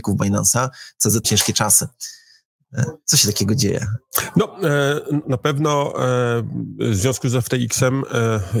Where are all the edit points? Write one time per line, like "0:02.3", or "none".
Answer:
0:01.2
0:05.2